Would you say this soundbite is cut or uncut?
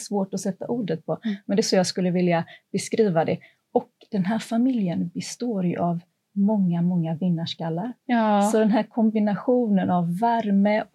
uncut